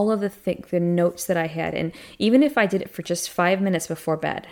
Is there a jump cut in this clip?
no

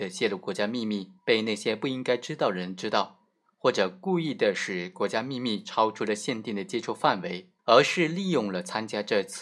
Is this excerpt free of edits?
no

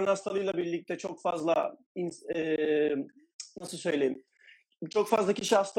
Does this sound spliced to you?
no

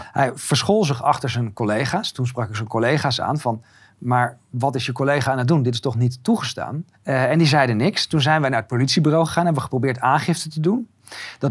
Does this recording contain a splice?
yes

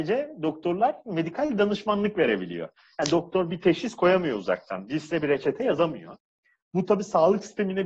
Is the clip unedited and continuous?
yes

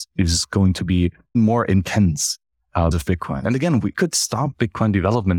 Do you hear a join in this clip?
yes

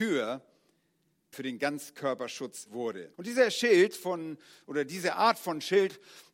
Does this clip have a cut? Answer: yes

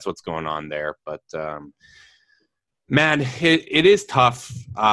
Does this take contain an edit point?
no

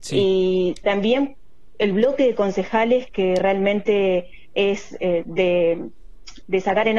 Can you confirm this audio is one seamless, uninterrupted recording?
yes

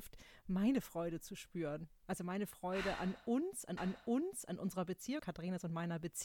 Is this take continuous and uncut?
no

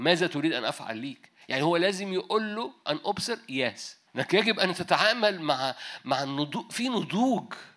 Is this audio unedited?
no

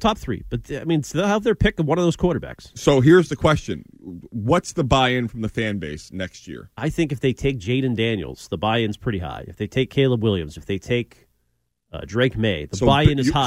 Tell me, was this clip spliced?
no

